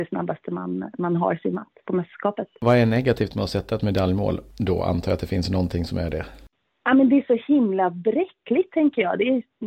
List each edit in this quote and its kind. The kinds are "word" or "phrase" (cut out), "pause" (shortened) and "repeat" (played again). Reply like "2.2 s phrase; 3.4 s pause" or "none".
none